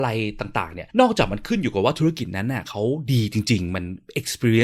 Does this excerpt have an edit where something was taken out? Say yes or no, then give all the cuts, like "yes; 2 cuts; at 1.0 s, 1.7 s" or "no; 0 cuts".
yes; 1 cut; at 0.9 s